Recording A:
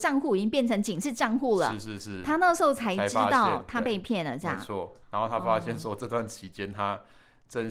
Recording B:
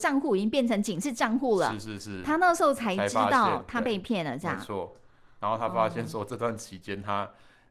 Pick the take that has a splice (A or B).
A